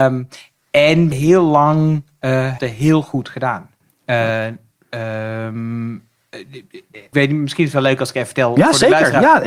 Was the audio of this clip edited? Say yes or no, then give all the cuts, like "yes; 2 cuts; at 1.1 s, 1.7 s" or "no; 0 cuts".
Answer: yes; 3 cuts; at 1.1 s, 2.6 s, 7.1 s